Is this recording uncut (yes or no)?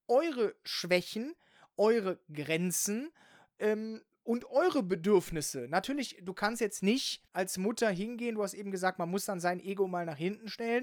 no